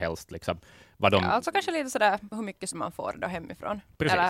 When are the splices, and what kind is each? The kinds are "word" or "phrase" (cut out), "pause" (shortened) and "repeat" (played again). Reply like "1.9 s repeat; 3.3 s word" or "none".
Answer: 2.3 s word; 2.7 s word